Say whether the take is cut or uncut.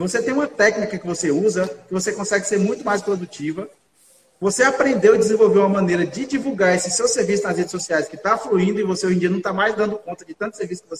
uncut